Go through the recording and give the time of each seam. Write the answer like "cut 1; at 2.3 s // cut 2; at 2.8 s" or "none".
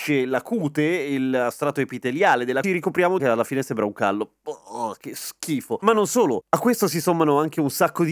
cut 1; at 2.6 s // cut 2; at 3.2 s